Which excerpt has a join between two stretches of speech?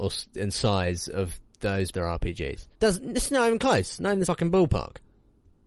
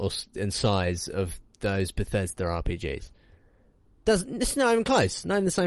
first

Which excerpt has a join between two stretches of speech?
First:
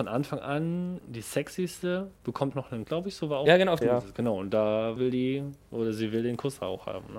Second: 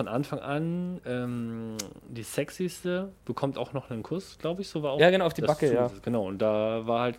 first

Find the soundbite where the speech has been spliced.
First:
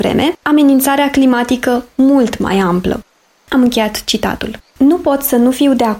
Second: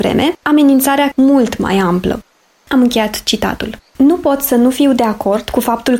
second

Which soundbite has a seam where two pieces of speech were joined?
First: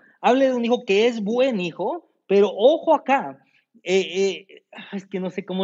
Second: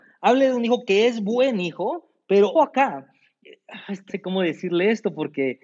second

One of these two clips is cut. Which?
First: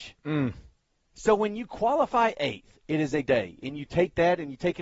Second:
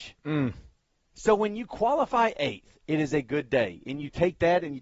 first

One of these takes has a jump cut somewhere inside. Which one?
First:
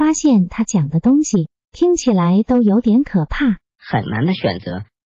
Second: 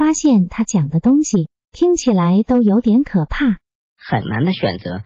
first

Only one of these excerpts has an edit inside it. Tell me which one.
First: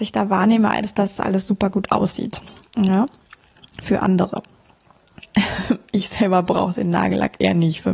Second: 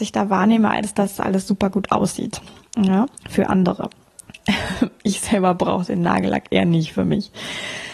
second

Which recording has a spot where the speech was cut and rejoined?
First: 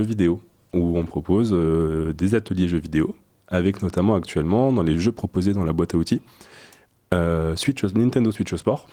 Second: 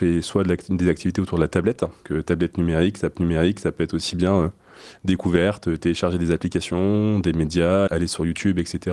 second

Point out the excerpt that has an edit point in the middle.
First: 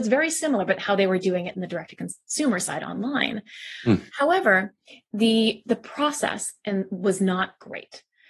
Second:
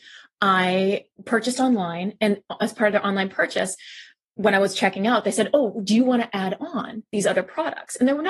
first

